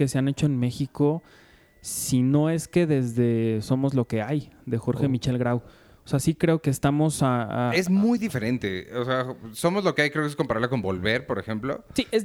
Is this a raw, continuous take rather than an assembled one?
no; 1 cut; at 6.6 s

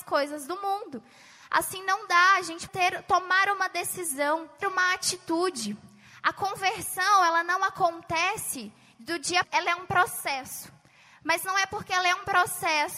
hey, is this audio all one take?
no; 3 cuts; at 2.7 s, 4.6 s, 9.4 s

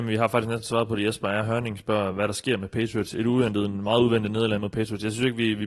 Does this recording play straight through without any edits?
yes; 0 cuts

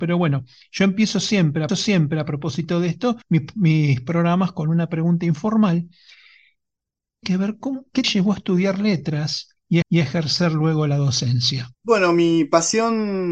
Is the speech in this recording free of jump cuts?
no; 6 cuts; at 1.7 s, 3.2 s, 7.2 s, 8.0 s, 9.8 s, 11.7 s

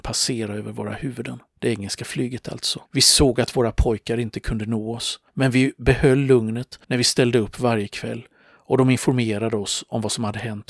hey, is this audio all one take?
no; 4 cuts; at 1.5 s, 2.9 s, 5.3 s, 6.8 s

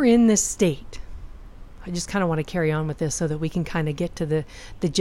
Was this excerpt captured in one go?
yes; 0 cuts

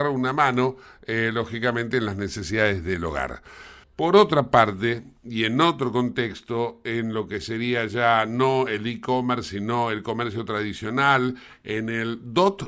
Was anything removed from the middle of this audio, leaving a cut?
no; 0 cuts

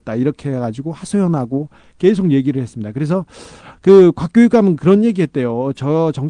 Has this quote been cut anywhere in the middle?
no; 0 cuts

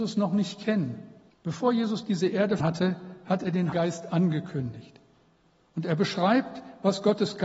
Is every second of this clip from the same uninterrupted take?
no; 3 cuts; at 1.3 s, 2.6 s, 3.7 s

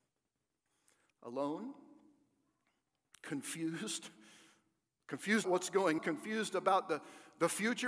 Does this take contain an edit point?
yes; 2 cuts; at 5.4 s, 6.0 s

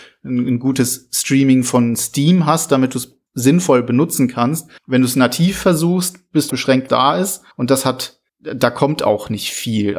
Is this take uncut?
no; 6 cuts; at 3.3 s, 4.8 s, 6.5 s, 6.9 s, 7.5 s, 8.3 s

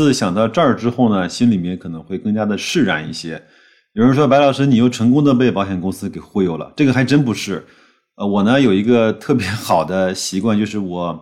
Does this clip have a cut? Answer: no; 0 cuts

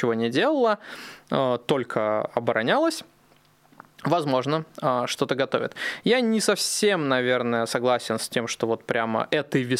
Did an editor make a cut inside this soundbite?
no; 0 cuts

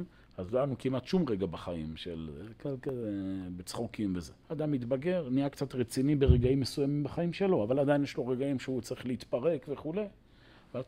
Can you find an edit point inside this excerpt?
yes; 1 cut; at 4.4 s

